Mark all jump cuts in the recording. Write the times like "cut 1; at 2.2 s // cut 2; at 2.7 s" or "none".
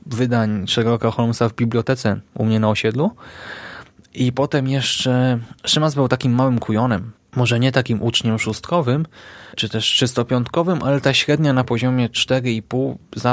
cut 1; at 7.2 s // cut 2; at 9.5 s